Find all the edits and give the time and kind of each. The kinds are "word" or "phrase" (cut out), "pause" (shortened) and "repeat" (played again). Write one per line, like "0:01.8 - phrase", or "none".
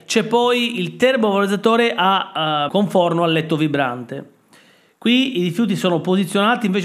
0:02.7 - word